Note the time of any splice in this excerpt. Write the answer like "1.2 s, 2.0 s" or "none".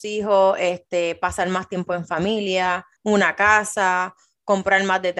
3.0 s